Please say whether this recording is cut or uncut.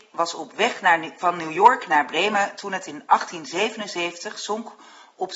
uncut